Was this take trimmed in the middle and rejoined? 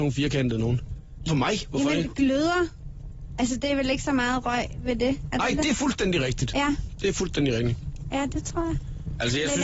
yes; 1 cut; at 1.3 s

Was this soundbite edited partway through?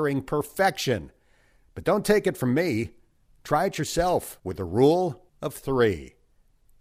yes; 2 cuts; at 4.4 s, 5.3 s

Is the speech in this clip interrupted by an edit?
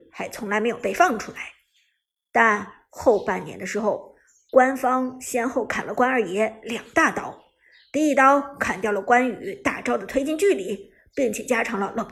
no; 0 cuts

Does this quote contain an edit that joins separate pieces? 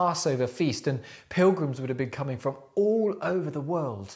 no; 0 cuts

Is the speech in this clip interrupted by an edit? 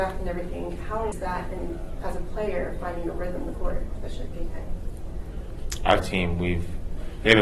yes; 3 cuts; at 1.1 s, 3.5 s, 6.0 s

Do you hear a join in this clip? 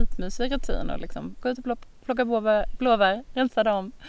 no; 0 cuts

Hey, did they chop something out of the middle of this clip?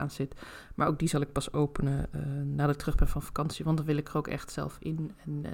no; 0 cuts

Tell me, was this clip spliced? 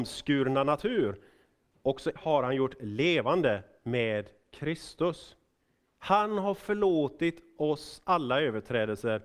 yes; 1 cut; at 2.2 s

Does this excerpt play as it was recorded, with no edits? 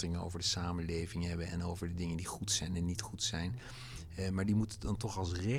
yes; 0 cuts

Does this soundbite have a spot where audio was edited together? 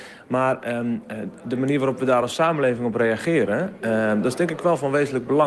no; 0 cuts

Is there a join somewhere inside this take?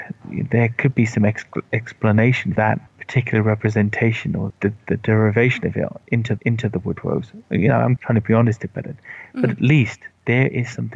yes; 5 cuts; at 2.6 s, 2.9 s, 4.5 s, 6.4 s, 8.0 s

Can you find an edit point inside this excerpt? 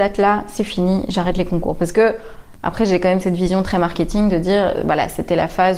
no; 0 cuts

